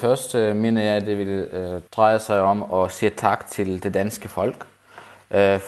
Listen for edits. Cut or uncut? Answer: cut